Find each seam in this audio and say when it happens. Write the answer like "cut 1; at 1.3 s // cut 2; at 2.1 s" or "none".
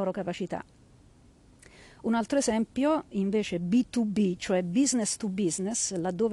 none